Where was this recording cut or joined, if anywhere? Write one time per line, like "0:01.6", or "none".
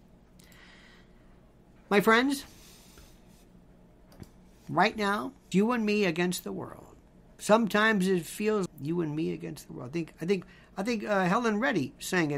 0:05.5
0:08.7